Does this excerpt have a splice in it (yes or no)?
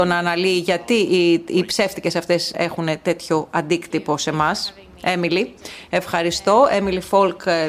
yes